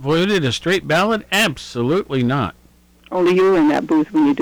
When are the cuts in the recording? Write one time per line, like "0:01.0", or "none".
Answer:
none